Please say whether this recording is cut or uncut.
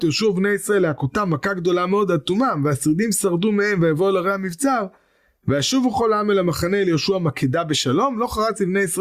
uncut